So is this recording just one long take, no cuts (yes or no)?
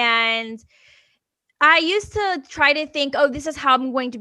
yes